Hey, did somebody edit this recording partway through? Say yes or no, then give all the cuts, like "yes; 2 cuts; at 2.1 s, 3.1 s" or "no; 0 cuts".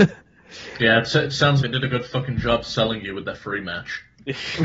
yes; 1 cut; at 1.6 s